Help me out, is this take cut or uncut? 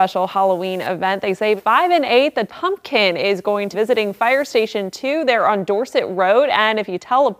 cut